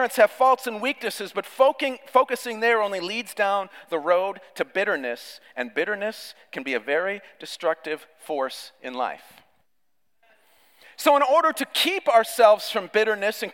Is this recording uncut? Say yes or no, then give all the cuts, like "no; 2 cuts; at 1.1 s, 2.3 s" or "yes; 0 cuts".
yes; 0 cuts